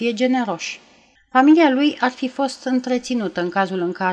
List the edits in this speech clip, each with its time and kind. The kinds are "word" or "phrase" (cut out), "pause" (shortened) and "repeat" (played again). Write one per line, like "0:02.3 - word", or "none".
0:01.2 - pause

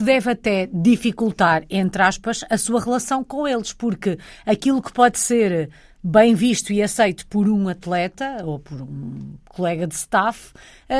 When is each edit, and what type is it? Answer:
none

